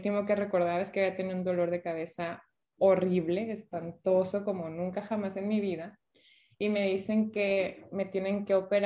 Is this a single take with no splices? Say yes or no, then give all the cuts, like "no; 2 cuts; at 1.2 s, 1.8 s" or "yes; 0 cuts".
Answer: yes; 0 cuts